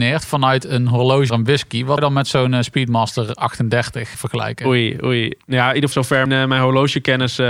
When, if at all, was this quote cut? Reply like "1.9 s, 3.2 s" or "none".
1.3 s, 2.0 s, 4.1 s, 5.9 s, 6.3 s